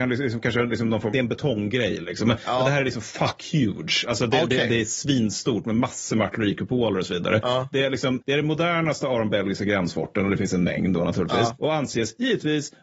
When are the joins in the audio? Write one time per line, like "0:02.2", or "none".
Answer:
0:01.1